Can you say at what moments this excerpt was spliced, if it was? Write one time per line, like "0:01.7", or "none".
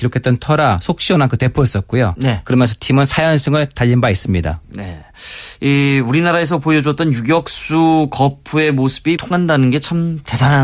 0:09.2